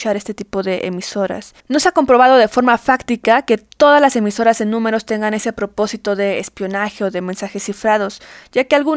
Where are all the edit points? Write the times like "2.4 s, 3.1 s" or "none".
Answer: 1.6 s